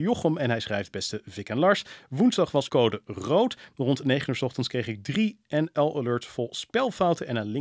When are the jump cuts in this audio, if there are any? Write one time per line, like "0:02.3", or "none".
0:02.7